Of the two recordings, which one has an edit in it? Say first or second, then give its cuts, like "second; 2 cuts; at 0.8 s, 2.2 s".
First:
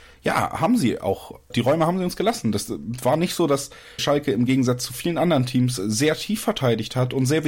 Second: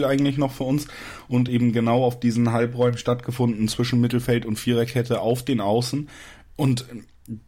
first; 2 cuts; at 1.5 s, 4.0 s